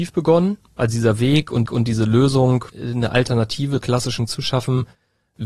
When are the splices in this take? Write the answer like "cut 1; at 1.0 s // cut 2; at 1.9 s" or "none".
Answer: cut 1; at 1.7 s // cut 2; at 2.7 s // cut 3; at 3.8 s // cut 4; at 4.3 s